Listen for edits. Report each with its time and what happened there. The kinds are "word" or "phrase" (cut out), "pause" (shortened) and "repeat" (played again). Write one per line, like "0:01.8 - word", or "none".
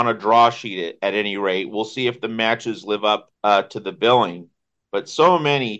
0:03.4 - pause